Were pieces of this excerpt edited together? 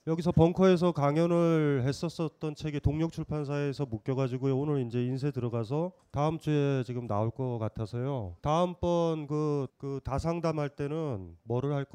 yes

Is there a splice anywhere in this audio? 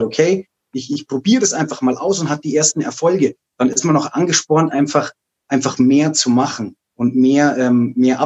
no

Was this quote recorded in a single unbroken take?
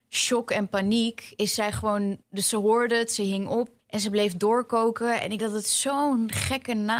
no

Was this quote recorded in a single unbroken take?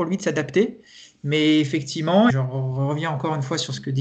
no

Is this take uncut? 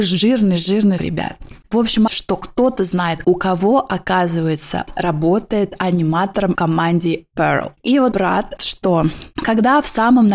no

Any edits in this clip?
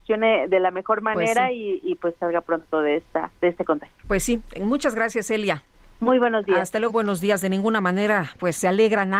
yes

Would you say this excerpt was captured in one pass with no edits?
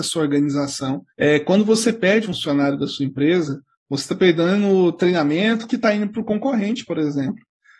no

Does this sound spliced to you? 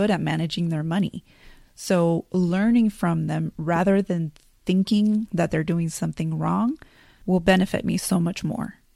no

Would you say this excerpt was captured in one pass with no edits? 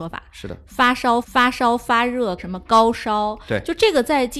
no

